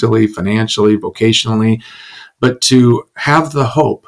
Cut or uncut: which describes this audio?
uncut